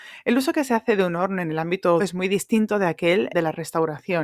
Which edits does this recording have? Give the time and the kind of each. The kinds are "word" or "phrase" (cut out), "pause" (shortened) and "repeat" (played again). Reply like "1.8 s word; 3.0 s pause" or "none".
2.0 s word; 3.3 s word